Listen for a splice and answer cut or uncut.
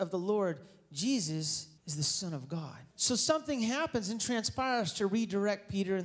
cut